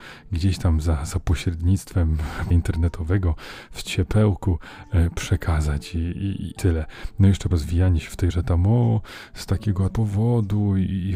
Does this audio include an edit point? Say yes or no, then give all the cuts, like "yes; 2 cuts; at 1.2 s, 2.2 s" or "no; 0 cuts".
yes; 5 cuts; at 2.5 s, 6.6 s, 7.5 s, 8.3 s, 9.9 s